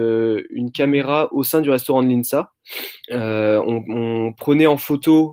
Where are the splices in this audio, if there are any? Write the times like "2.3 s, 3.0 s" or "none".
3.0 s